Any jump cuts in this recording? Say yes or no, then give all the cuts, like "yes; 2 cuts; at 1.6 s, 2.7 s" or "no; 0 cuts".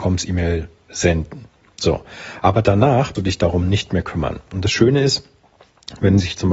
yes; 1 cut; at 3.1 s